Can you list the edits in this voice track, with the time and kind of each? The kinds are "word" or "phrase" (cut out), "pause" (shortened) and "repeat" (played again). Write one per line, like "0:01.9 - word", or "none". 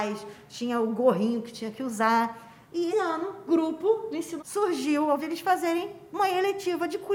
0:02.9 - word
0:03.5 - word
0:04.4 - word
0:05.2 - word